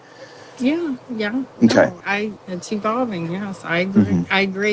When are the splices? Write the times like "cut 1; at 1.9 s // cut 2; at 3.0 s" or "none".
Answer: cut 1; at 1.5 s // cut 2; at 2.0 s // cut 3; at 2.4 s